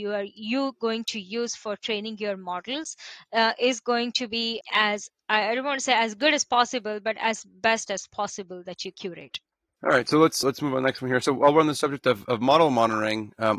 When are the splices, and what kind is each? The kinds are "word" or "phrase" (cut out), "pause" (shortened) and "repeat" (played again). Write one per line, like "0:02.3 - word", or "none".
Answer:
0:04.6 - word
0:08.9 - phrase
0:09.5 - pause
0:10.4 - word